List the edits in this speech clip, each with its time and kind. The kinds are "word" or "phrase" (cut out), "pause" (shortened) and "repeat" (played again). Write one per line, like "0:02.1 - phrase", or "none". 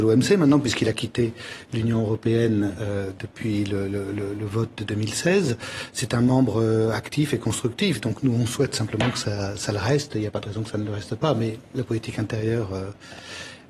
none